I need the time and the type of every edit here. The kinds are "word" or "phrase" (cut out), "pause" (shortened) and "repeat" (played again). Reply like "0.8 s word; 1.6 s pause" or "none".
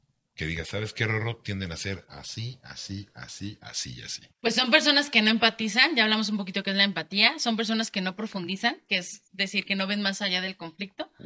4.3 s pause